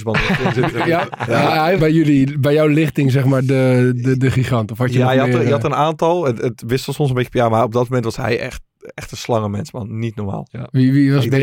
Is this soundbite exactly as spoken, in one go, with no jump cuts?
no; 1 cut; at 1.8 s

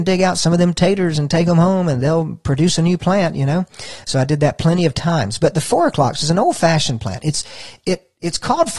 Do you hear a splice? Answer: no; 0 cuts

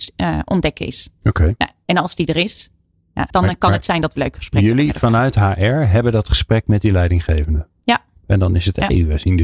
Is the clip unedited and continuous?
no; 3 cuts; at 1.1 s, 3.3 s, 4.2 s

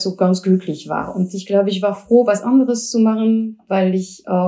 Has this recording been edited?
no; 0 cuts

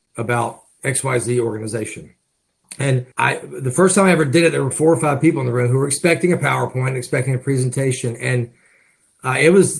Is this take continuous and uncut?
no; 2 cuts; at 3.1 s, 4.7 s

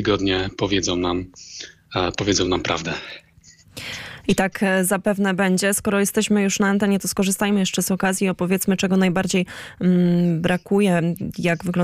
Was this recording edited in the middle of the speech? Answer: no; 0 cuts

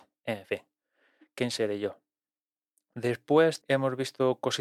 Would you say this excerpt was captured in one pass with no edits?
no; 1 cut; at 3.6 s

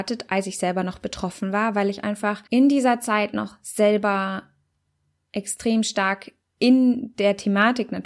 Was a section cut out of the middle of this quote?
yes; 1 cut; at 2.5 s

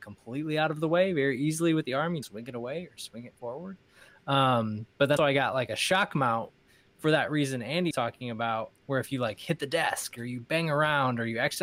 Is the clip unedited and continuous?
no; 4 cuts; at 2.2 s, 5.2 s, 7.9 s, 8.7 s

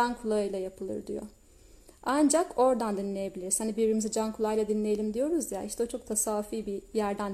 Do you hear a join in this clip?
no; 0 cuts

